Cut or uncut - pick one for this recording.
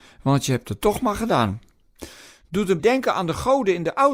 cut